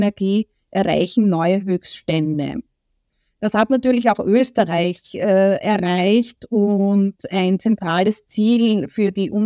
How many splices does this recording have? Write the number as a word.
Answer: zero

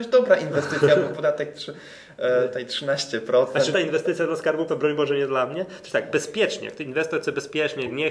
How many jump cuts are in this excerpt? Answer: two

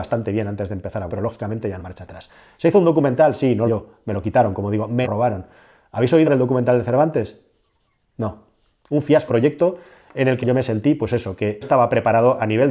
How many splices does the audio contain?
eight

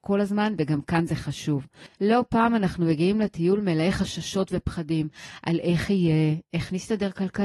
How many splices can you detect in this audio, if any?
one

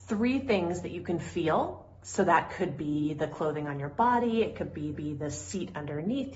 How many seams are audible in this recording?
one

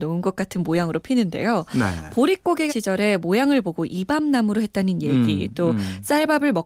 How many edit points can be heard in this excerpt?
one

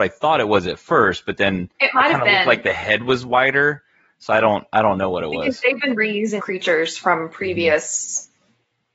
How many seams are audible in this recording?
two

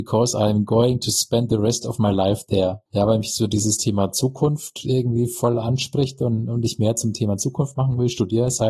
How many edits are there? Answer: zero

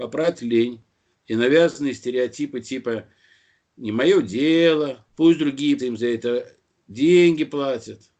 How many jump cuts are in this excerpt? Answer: three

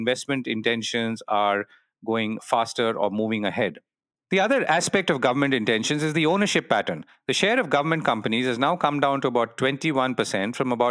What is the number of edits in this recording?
zero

